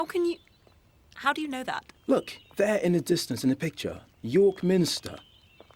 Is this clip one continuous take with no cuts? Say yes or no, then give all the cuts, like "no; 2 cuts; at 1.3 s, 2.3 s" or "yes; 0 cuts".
no; 2 cuts; at 2.4 s, 4.1 s